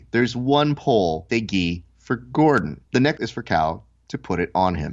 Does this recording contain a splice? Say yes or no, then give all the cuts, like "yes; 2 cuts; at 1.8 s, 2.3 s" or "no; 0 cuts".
yes; 3 cuts; at 1.3 s, 2.8 s, 3.2 s